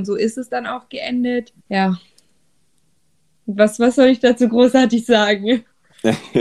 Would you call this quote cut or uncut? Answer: cut